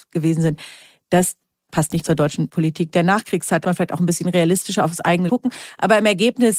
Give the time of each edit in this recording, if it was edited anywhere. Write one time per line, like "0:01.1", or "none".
0:03.6
0:05.3